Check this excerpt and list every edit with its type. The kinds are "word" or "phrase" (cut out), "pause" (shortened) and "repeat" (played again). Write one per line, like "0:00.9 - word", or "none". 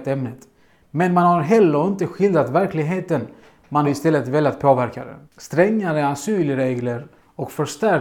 0:03.8 - word
0:05.3 - pause